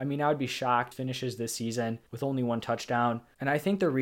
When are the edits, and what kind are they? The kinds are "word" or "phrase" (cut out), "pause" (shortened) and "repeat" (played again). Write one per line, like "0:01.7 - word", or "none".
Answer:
0:00.9 - phrase
0:02.1 - pause